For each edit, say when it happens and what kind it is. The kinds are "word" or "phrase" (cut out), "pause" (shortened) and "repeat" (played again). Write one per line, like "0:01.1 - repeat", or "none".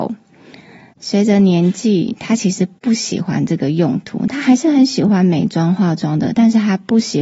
none